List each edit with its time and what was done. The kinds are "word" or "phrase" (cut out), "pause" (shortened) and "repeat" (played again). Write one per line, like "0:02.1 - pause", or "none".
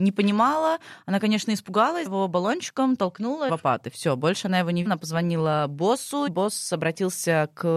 0:02.1 - word
0:03.5 - phrase
0:04.9 - word
0:06.3 - word